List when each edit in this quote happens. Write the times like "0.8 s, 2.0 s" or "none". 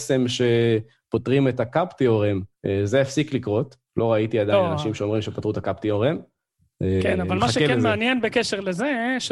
2.5 s, 3.9 s